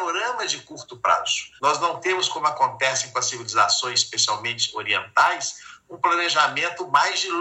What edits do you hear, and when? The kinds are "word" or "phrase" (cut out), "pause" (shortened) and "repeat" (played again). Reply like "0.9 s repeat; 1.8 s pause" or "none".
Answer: 1.6 s pause